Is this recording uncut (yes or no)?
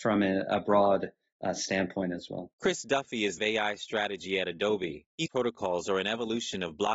no